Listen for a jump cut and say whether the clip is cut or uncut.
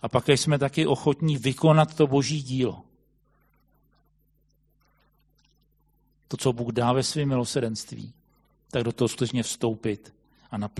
uncut